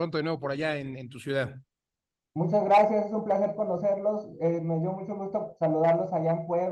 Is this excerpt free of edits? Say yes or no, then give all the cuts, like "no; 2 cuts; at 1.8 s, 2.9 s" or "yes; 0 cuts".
yes; 0 cuts